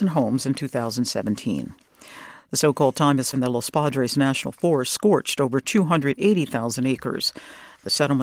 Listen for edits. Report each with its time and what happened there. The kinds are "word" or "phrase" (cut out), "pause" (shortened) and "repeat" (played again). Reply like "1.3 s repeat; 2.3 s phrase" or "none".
3.3 s word